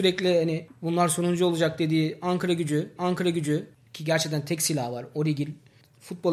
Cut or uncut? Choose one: cut